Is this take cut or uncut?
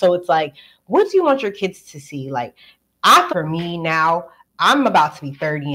cut